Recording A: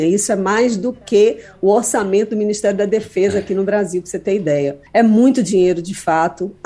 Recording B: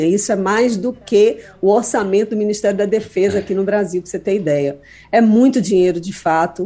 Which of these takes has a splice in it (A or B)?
A